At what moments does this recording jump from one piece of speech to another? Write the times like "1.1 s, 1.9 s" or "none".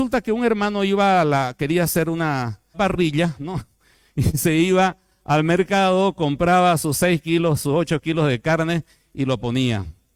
2.7 s